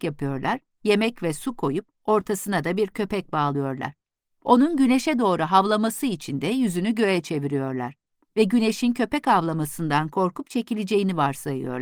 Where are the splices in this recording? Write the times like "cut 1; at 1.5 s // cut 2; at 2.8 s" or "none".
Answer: none